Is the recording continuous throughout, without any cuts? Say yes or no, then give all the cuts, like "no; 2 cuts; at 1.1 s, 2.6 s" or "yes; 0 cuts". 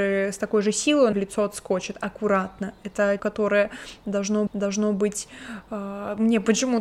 no; 3 cuts; at 1.1 s, 3.2 s, 4.5 s